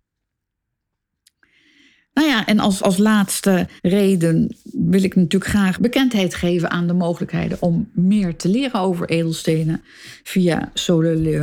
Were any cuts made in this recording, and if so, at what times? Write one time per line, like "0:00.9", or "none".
0:02.8
0:03.8
0:05.8